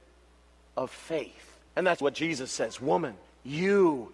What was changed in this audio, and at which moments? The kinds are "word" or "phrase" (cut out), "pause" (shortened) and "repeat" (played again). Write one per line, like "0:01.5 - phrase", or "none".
0:01.7 - pause
0:02.0 - word
0:03.2 - pause